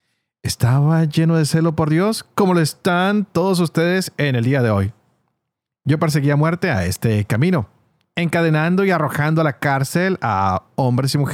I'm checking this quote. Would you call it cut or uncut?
uncut